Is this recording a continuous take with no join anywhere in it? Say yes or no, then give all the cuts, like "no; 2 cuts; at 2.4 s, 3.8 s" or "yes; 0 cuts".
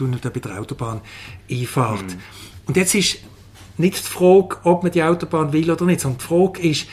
yes; 0 cuts